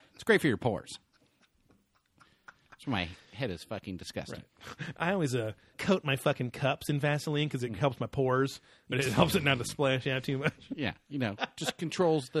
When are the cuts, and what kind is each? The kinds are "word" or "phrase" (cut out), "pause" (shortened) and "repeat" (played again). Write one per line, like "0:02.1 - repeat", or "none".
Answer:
0:05.7 - word
0:08.9 - word